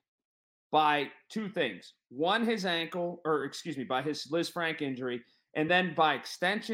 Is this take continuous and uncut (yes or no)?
yes